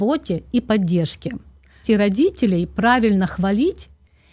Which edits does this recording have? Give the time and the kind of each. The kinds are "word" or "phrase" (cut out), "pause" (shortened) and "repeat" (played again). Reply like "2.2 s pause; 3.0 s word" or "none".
1.8 s word